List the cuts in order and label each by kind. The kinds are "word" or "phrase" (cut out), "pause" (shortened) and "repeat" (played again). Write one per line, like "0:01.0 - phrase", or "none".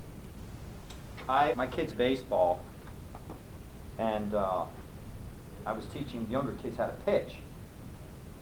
0:01.5 - word
0:01.9 - word
0:06.3 - word